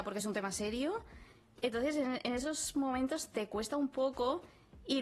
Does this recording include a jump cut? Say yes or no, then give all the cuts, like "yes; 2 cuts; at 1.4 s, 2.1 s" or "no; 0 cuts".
no; 0 cuts